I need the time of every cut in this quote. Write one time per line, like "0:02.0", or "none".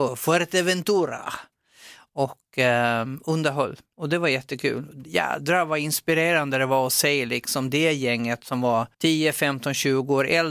0:08.9